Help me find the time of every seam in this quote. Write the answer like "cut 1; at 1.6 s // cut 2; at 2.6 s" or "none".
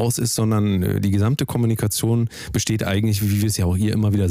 none